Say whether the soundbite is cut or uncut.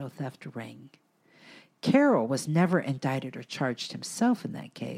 uncut